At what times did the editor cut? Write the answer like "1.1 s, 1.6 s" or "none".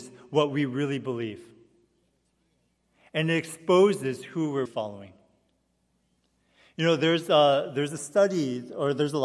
4.7 s